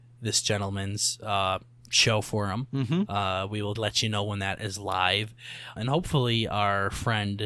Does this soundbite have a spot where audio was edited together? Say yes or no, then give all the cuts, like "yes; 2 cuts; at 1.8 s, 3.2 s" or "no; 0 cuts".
yes; 2 cuts; at 3.8 s, 5.8 s